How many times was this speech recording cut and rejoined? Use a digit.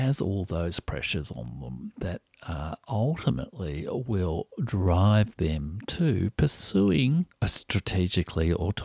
0